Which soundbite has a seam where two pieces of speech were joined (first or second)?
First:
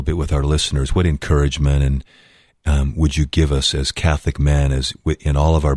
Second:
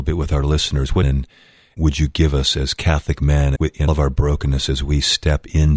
second